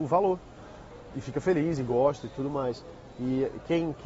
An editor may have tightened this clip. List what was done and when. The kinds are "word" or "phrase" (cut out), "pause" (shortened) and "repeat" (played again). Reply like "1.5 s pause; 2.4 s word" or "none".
1.1 s word

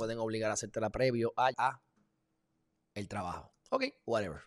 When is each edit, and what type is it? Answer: 0.9 s word; 1.5 s word

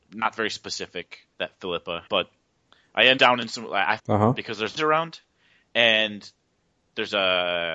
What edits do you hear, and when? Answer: 1.3 s pause; 2.1 s pause; 3.2 s word; 4.0 s phrase; 4.8 s phrase

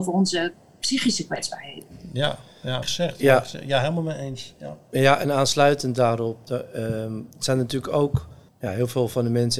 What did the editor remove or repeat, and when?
2.8 s word; 7.3 s pause; 8.5 s pause

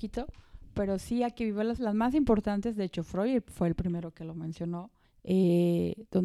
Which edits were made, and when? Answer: 1.8 s word; 5.0 s pause

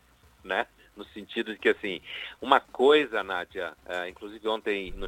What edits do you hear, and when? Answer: 3.8 s pause

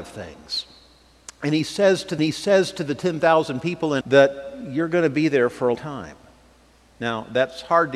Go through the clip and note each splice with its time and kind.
2.2 s repeat; 4.0 s word; 5.7 s word

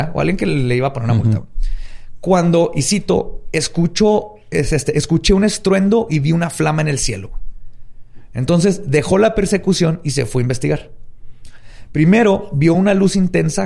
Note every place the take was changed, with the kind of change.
none

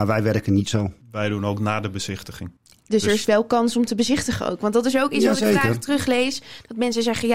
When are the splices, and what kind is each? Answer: 1.0 s pause; 2.6 s pause

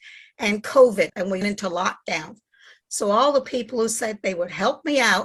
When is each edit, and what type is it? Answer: 1.1 s word; 1.4 s word

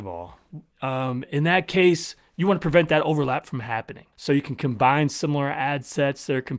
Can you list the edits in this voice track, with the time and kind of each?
4.1 s pause

